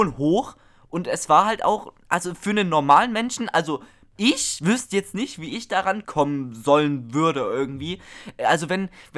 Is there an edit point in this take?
yes; 1 cut; at 6.0 s

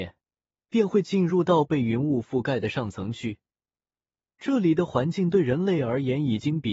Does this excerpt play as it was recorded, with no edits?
yes; 0 cuts

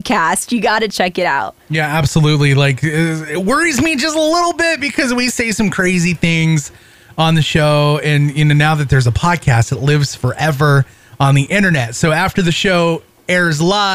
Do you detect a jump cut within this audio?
no; 0 cuts

